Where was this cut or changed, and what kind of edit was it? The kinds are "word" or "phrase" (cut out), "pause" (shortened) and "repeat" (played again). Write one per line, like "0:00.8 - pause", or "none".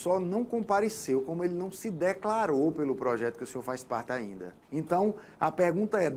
0:04.6 - pause